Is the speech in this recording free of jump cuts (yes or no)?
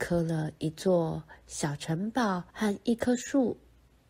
no